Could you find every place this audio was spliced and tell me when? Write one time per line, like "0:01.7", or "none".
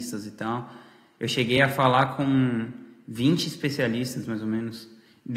none